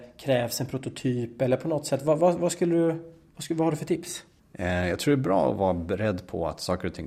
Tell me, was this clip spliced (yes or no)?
no